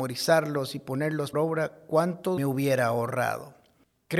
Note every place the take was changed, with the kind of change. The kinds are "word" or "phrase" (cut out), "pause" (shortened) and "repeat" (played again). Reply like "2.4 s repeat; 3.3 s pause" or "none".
1.3 s word; 2.4 s phrase